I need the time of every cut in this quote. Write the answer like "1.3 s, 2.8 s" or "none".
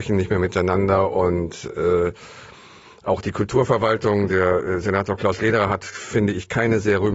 none